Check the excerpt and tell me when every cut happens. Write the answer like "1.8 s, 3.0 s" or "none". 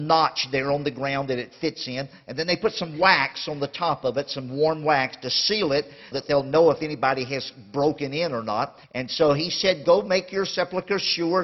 6.1 s, 8.8 s, 9.8 s